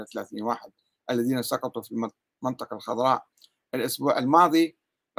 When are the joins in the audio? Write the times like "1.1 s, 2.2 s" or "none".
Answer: none